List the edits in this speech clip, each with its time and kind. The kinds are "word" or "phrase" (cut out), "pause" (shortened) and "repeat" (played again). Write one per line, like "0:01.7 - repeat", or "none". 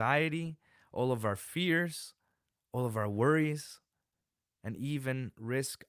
none